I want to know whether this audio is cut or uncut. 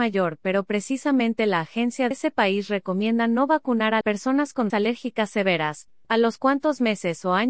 cut